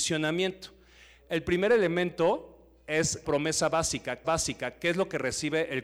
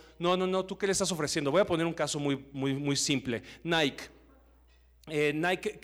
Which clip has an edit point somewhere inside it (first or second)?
first